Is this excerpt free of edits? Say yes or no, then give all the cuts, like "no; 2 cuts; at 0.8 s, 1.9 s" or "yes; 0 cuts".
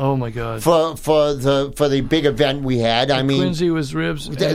yes; 0 cuts